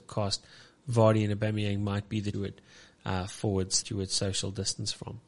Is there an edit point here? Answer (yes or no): yes